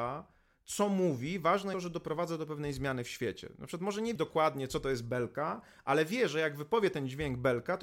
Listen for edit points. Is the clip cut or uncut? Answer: cut